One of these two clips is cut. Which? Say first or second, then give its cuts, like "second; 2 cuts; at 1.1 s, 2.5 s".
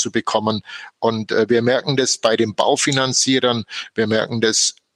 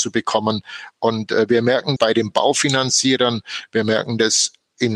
second; 1 cut; at 2.0 s